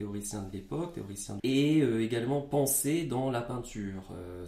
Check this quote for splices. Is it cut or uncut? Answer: cut